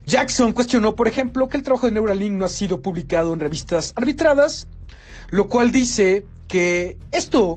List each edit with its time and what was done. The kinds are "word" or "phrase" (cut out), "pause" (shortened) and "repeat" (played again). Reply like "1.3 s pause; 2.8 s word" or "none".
none